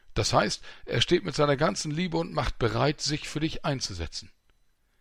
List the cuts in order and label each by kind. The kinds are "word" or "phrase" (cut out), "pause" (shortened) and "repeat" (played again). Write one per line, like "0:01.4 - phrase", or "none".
none